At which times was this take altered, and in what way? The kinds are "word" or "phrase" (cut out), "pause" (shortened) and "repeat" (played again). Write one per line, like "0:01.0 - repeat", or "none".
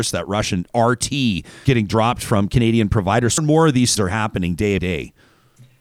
0:01.6 - word
0:03.4 - word
0:04.0 - word
0:04.8 - word